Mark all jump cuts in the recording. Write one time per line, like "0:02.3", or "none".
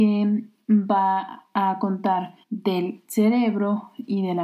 0:02.4